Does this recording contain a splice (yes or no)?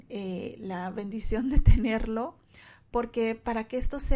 no